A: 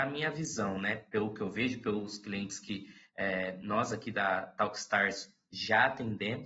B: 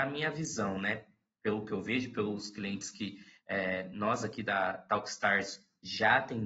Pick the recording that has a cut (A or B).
A